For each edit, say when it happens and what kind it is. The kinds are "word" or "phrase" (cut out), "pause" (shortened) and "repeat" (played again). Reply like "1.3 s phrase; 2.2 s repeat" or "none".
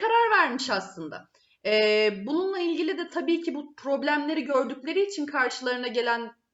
none